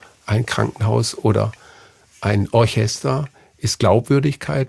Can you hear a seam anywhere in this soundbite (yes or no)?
no